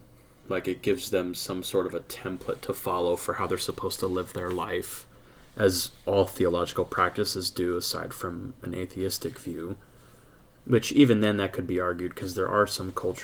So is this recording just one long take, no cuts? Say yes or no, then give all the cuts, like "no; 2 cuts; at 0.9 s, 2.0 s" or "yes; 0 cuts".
yes; 0 cuts